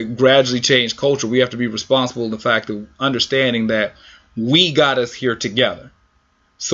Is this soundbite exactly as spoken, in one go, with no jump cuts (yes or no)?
yes